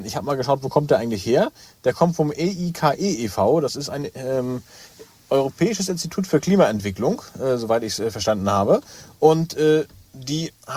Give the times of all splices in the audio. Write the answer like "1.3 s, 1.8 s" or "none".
none